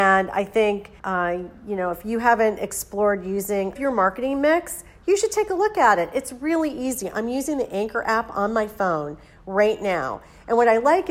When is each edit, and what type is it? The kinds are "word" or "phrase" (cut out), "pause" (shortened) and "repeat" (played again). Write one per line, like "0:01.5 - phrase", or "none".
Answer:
0:01.0 - pause
0:03.7 - phrase